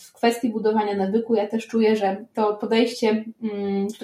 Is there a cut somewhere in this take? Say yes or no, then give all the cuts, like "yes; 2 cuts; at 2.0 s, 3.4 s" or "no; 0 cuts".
no; 0 cuts